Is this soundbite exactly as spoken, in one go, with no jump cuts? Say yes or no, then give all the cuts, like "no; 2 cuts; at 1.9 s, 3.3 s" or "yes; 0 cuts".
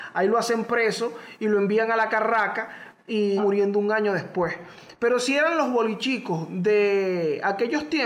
no; 1 cut; at 3.4 s